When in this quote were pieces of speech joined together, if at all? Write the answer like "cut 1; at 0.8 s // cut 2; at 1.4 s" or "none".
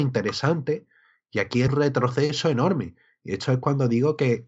cut 1; at 1.7 s